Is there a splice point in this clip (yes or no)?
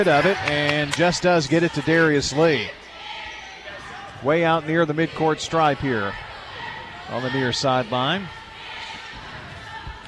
no